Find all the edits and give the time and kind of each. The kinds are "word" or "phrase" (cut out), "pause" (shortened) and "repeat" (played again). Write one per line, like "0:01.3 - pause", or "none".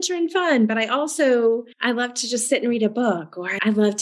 0:01.7 - pause